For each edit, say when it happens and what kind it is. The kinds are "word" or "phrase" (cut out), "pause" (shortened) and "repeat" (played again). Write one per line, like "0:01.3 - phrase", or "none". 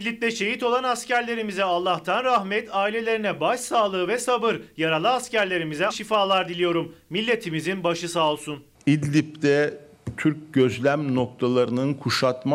0:05.9 - word